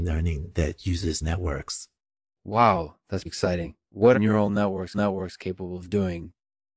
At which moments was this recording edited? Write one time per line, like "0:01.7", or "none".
0:01.2
0:03.3
0:04.1
0:04.9